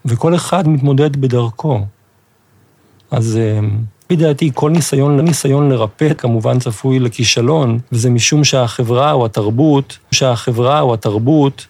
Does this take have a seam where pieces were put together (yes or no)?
yes